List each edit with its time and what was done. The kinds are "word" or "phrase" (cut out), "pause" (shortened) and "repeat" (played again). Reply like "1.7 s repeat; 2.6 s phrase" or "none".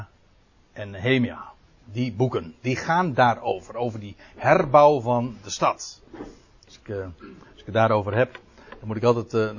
none